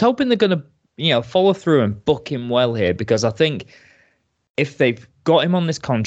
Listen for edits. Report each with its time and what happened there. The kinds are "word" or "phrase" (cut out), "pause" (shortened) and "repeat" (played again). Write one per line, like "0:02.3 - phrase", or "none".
none

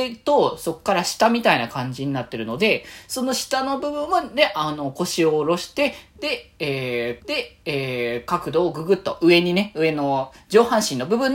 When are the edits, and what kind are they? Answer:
0:07.2 - repeat

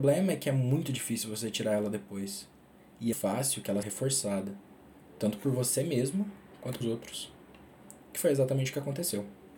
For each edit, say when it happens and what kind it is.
0:03.1 - word
0:03.8 - word
0:06.8 - word

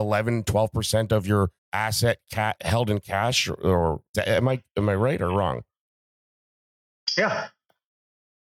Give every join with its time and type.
0:01.6 - pause
0:02.6 - word
0:04.1 - word

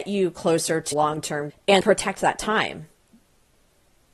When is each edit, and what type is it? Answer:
0:00.9 - word
0:01.5 - word
0:01.8 - word

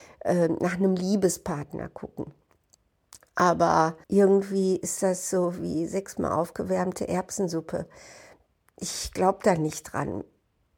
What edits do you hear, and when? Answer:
0:04.0 - pause

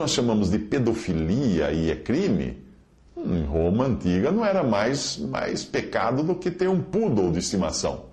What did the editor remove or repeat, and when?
none

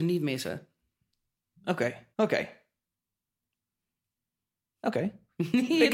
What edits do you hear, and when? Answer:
0:02.1 - pause

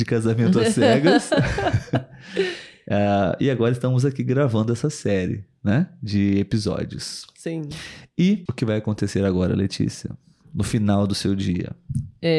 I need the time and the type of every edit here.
none

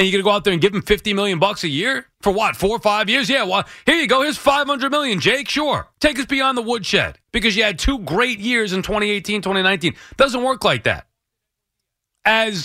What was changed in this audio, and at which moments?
0:02.1 - pause
0:05.9 - pause
0:07.2 - pause

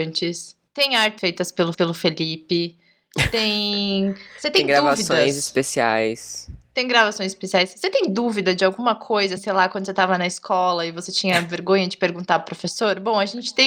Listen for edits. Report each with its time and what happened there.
0:01.2 - word
0:01.7 - repeat
0:09.4 - word

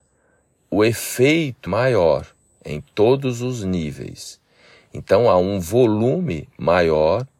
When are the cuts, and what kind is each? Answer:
0:01.7 - phrase

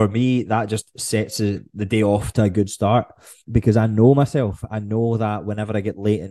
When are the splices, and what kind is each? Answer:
0:02.3 - word
0:03.4 - pause

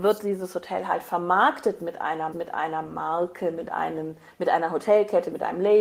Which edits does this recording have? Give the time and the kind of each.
0:02.3 - repeat

